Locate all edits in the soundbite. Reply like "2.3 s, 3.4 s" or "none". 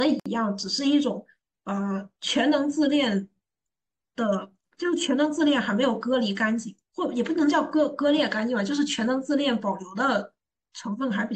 6.8 s